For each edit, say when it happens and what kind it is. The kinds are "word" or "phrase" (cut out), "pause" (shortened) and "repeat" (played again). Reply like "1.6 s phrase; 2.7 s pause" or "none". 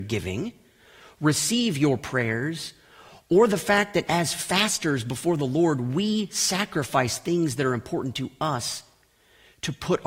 none